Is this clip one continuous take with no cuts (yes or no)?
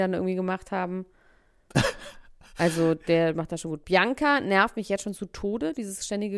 yes